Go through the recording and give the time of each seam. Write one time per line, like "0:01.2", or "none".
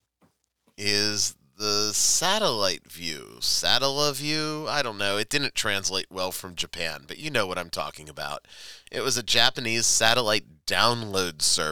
none